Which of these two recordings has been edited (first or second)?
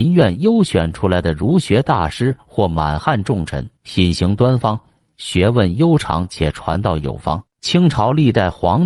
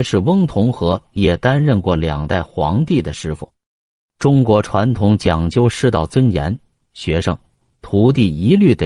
first